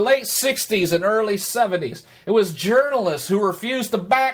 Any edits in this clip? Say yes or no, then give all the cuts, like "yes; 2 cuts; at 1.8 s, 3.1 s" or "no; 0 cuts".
no; 0 cuts